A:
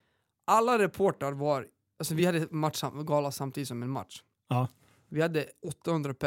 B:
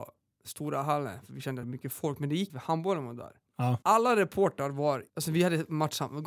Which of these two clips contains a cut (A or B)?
B